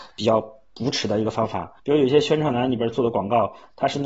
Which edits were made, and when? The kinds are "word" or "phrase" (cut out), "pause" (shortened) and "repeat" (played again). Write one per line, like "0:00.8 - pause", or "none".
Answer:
0:01.8 - pause